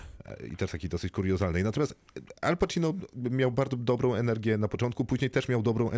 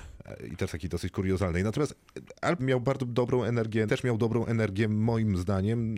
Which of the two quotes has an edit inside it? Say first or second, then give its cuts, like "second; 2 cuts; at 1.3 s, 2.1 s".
second; 2 cuts; at 2.6 s, 3.9 s